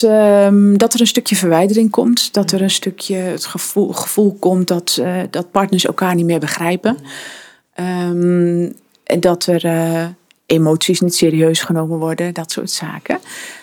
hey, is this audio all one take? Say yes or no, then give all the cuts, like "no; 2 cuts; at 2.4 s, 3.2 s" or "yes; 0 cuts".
yes; 0 cuts